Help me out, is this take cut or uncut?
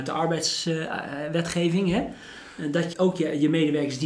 cut